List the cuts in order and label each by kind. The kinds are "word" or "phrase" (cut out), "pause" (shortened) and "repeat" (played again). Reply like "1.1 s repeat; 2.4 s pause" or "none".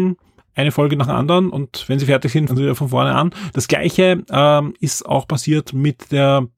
2.5 s word